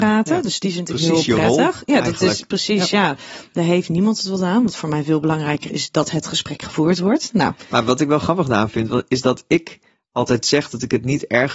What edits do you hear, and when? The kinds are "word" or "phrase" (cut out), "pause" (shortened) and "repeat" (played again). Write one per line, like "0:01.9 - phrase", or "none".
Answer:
0:05.7 - word